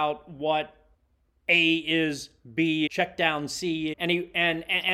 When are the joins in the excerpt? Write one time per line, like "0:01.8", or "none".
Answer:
0:00.9
0:02.9
0:03.9